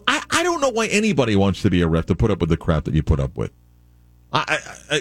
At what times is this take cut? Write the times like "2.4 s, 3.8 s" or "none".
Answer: none